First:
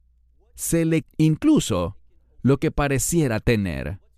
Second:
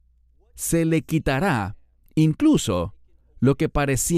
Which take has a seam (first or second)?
first